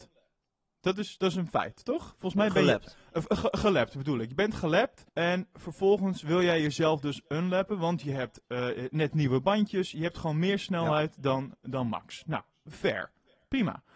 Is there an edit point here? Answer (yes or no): yes